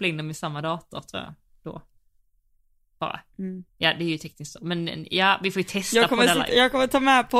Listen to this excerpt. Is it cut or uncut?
cut